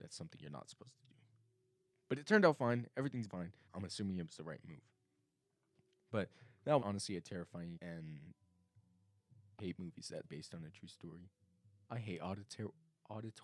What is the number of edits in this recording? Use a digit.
6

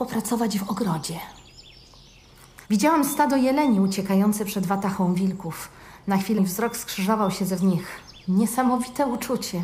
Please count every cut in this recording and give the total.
3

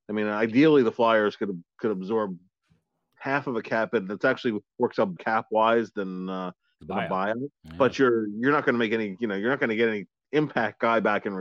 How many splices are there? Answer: 2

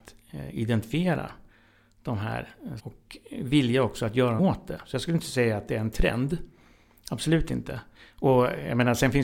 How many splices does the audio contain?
2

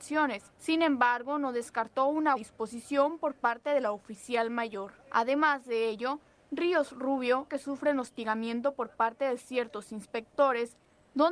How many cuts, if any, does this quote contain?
3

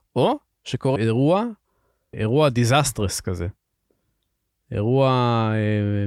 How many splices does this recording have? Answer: 2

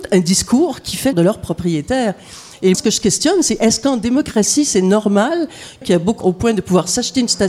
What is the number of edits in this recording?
4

